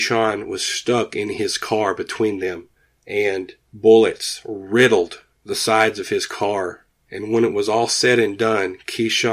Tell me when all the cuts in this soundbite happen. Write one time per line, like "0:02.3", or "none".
none